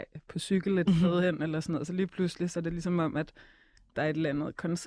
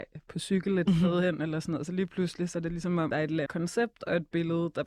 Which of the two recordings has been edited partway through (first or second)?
second